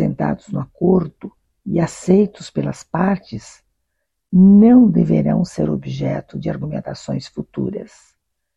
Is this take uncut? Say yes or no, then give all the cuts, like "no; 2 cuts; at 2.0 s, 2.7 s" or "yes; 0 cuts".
yes; 0 cuts